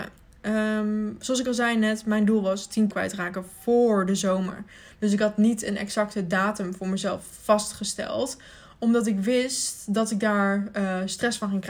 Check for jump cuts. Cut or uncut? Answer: cut